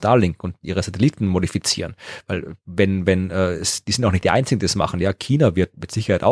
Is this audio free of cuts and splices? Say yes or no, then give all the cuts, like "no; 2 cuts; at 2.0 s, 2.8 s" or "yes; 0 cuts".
yes; 0 cuts